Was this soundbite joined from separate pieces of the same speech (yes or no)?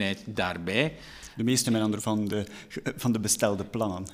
yes